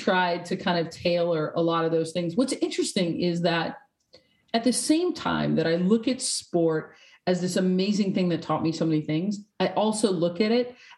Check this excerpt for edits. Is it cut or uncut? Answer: uncut